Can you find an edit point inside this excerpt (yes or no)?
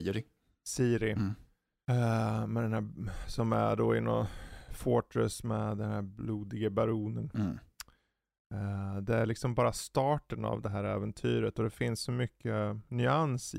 no